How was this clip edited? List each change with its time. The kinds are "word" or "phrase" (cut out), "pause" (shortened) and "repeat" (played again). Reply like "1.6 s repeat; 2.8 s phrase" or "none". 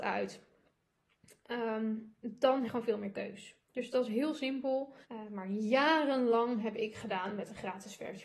2.6 s word; 3.7 s pause; 5.0 s pause